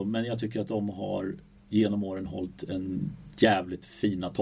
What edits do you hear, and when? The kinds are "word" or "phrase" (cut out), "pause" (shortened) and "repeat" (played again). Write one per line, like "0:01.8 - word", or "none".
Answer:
none